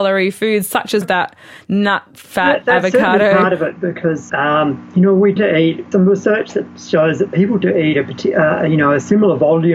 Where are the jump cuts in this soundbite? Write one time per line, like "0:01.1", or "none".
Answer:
0:01.0
0:04.3
0:05.4
0:05.9
0:07.6

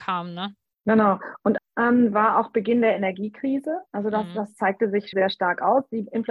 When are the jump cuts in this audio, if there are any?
0:01.6
0:03.9
0:05.1

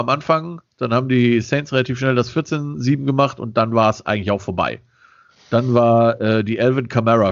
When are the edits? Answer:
none

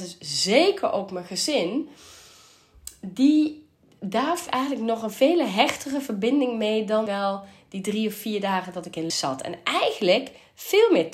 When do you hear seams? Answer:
0:04.5
0:07.1
0:09.1

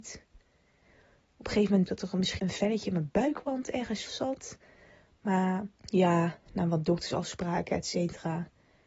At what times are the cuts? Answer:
0:01.9
0:02.4
0:04.1
0:05.7

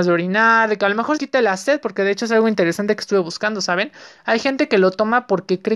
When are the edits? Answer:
0:01.2

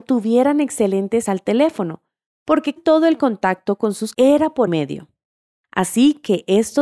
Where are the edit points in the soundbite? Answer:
0:01.3
0:02.8
0:04.1
0:04.7

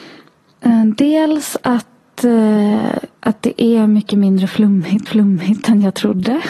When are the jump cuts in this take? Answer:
0:03.2
0:05.1

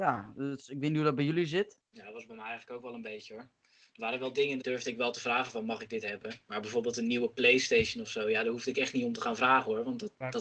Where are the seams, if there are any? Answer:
0:01.8
0:04.6
0:06.4

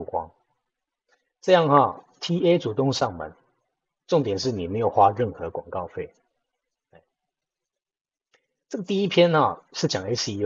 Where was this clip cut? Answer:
none

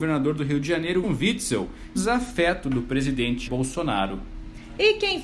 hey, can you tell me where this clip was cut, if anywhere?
0:01.0
0:02.0
0:03.5

